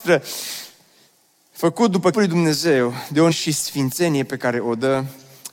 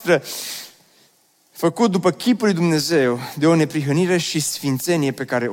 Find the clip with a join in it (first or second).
first